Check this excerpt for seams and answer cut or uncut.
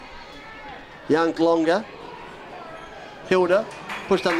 cut